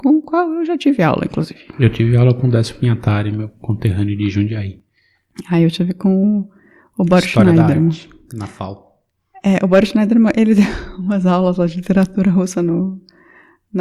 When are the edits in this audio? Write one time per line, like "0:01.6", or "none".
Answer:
none